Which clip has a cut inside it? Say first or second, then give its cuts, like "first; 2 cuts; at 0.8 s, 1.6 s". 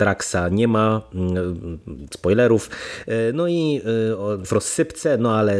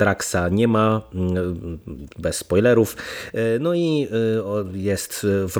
first; 2 cuts; at 2.1 s, 4.4 s